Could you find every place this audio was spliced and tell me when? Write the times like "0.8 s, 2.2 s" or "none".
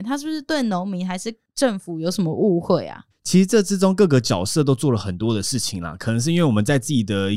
3.1 s